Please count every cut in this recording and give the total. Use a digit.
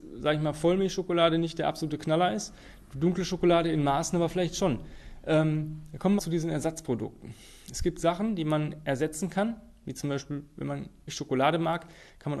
2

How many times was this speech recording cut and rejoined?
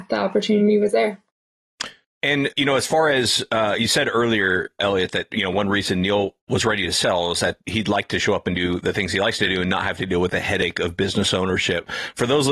0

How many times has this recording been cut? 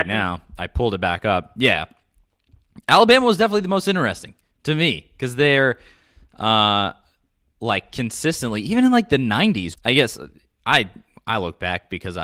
1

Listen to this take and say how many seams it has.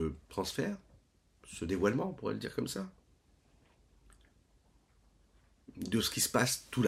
0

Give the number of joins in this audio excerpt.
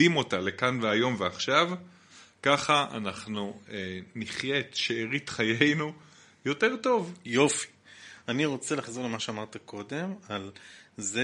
0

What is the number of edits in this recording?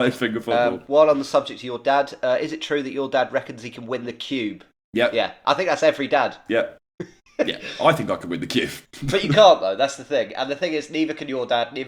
0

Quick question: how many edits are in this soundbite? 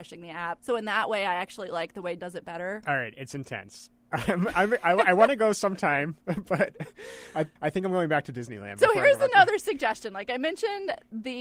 2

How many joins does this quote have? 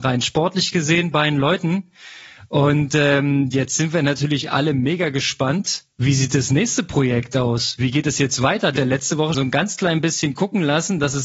3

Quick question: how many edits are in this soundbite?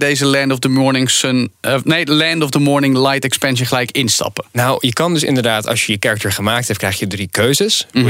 0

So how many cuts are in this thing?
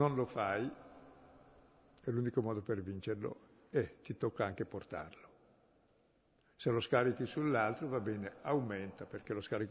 0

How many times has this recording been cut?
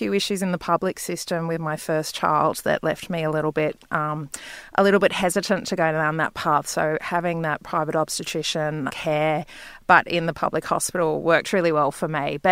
1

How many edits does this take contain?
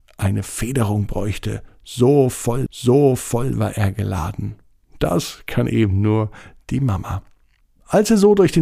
1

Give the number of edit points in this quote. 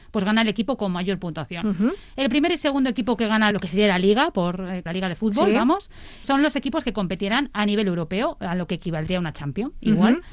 3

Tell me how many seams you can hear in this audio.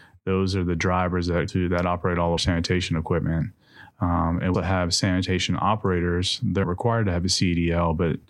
4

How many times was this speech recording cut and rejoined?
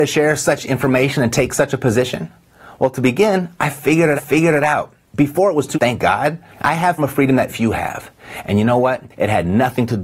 6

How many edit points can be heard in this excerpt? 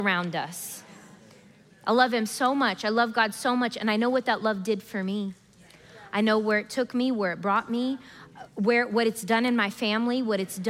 0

